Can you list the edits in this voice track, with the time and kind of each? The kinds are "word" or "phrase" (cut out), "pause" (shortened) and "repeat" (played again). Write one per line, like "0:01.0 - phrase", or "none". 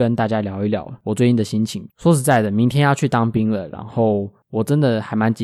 0:01.9 - pause